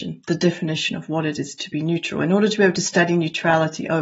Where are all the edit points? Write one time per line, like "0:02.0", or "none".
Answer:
none

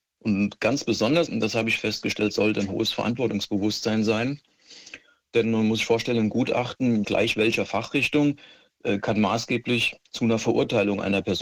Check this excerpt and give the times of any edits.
0:01.3
0:07.0

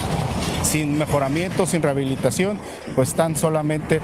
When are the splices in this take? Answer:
0:03.1

